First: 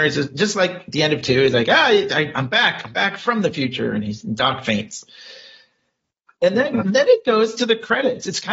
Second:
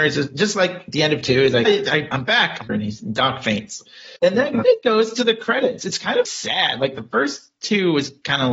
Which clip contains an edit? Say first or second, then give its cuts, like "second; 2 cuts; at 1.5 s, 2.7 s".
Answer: second; 5 cuts; at 1.6 s, 2.7 s, 4.2 s, 4.6 s, 6.3 s